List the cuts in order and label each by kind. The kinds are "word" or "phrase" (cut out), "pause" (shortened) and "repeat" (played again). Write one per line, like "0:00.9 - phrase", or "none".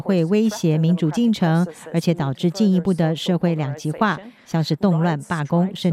none